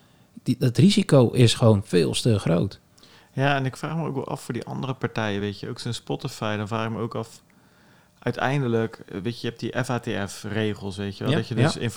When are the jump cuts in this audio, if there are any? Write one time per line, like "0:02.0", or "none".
none